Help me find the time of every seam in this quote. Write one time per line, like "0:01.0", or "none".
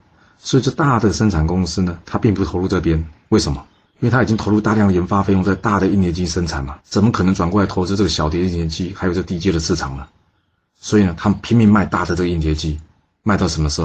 0:03.9
0:06.8